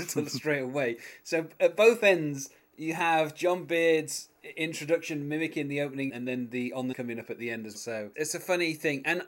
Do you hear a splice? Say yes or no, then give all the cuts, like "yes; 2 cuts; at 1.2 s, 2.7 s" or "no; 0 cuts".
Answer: yes; 4 cuts; at 6.1 s, 6.9 s, 7.7 s, 8.1 s